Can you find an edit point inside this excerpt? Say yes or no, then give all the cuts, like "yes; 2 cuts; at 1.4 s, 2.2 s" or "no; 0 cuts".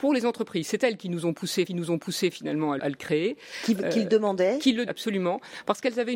yes; 3 cuts; at 1.7 s, 2.8 s, 4.9 s